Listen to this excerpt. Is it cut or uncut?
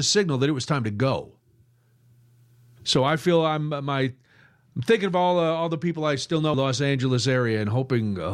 cut